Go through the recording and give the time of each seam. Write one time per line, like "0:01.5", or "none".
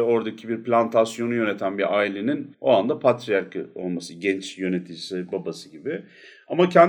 0:02.5